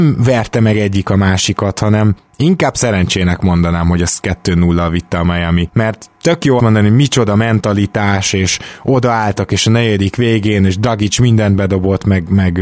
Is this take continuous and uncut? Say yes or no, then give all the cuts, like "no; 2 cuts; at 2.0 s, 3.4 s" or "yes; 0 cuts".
no; 1 cut; at 6.6 s